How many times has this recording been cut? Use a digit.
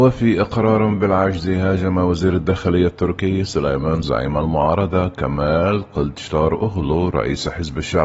1